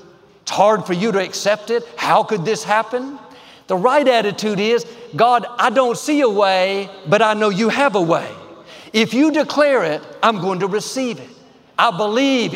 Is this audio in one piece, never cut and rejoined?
yes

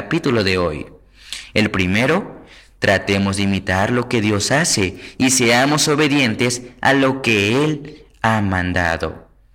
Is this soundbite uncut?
yes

